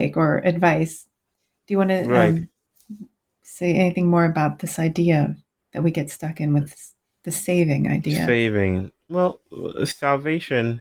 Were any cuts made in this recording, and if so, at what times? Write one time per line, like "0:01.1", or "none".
none

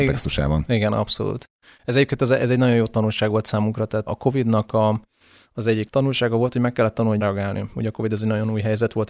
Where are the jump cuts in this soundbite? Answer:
0:04.1
0:05.9
0:07.2

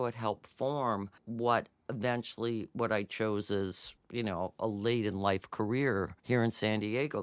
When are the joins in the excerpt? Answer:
0:01.2
0:04.0
0:06.2

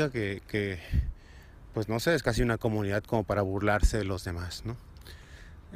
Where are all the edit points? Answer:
none

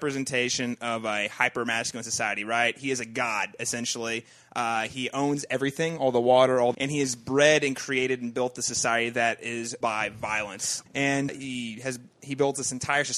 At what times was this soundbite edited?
0:06.7
0:09.8
0:11.3

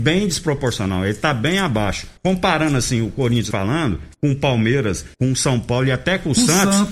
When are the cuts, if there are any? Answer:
0:02.2
0:03.5
0:04.1
0:05.1

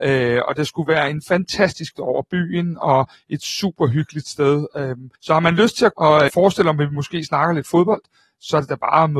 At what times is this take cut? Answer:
0:01.9
0:05.2
0:05.9
0:06.3

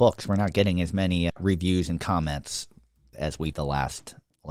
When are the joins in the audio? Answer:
0:01.3
0:03.1
0:03.5

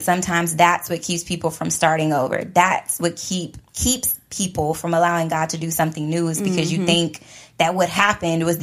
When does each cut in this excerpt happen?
0:03.7

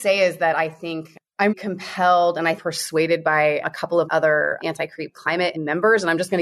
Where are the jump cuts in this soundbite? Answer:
0:01.5
0:02.6
0:03.6
0:04.1
0:04.6
0:05.5

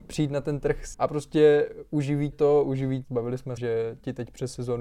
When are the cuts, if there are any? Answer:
0:00.9
0:02.3
0:03.0
0:03.6

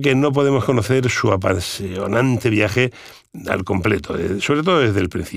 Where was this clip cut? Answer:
none

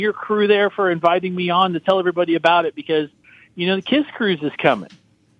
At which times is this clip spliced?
none

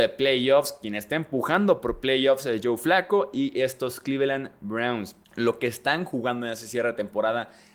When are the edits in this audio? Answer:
0:05.2

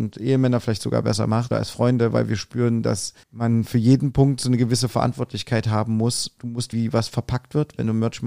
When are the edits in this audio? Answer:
0:01.5
0:03.2
0:06.7

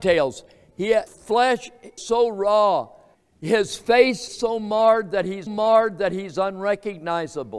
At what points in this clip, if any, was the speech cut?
0:01.1
0:02.0
0:03.1
0:04.3
0:05.5

